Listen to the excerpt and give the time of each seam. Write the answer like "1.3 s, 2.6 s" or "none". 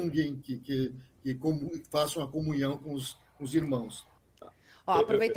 4.2 s